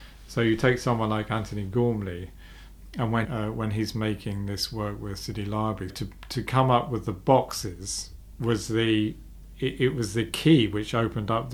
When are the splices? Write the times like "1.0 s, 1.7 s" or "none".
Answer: 3.2 s, 5.9 s